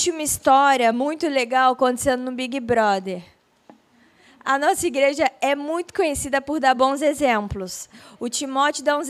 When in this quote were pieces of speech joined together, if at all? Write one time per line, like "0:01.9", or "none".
none